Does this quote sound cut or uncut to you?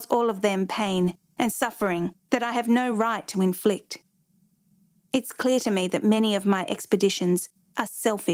uncut